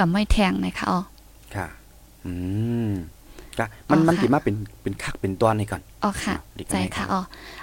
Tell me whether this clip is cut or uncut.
uncut